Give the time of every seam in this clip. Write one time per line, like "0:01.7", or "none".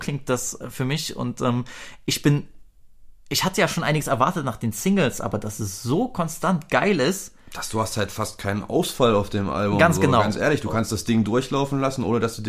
none